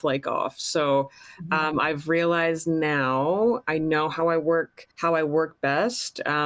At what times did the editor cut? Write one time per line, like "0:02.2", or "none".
0:04.9